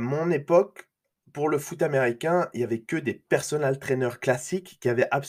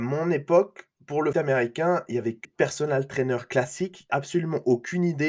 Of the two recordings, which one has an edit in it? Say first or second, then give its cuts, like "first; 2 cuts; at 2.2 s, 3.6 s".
second; 4 cuts; at 1.0 s, 1.3 s, 2.4 s, 4.1 s